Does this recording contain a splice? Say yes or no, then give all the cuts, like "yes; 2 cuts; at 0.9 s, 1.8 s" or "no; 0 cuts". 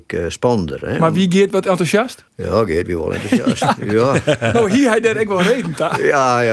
yes; 1 cut; at 2.3 s